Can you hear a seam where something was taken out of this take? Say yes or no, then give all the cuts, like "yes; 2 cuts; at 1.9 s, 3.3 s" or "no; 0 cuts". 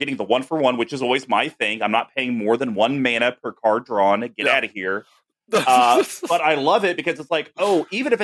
no; 0 cuts